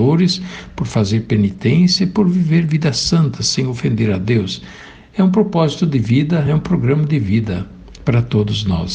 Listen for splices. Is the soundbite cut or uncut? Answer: uncut